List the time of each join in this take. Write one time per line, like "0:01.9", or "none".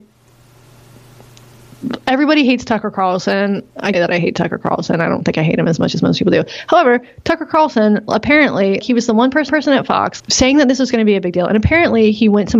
0:03.9
0:08.8
0:09.5
0:10.2